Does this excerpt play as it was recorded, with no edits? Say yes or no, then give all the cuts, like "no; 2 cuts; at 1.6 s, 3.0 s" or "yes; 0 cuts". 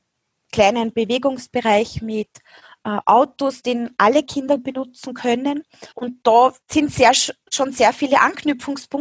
no; 2 cuts; at 5.9 s, 6.6 s